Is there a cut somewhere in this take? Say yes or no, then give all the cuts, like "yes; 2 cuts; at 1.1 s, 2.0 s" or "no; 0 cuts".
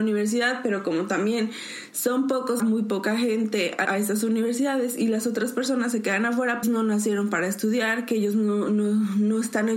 yes; 3 cuts; at 2.6 s, 3.8 s, 6.6 s